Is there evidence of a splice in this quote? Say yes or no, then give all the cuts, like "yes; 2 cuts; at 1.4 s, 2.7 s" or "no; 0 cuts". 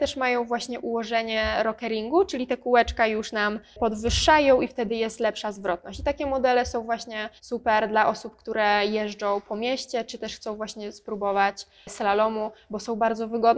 yes; 1 cut; at 7.4 s